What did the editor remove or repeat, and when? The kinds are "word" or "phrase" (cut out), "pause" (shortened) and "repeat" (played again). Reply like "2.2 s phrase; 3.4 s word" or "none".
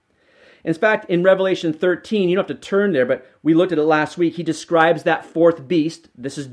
none